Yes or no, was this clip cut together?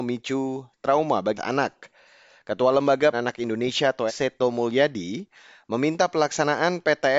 yes